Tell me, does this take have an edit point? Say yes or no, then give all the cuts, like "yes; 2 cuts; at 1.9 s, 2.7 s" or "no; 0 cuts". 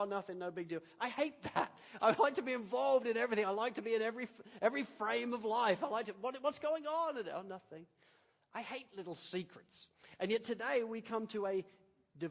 no; 0 cuts